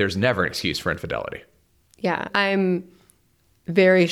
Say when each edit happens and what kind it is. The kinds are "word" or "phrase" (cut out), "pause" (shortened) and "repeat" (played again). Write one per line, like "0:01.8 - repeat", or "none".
none